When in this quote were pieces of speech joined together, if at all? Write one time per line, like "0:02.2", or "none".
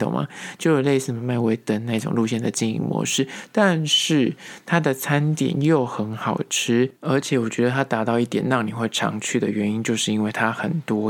0:07.0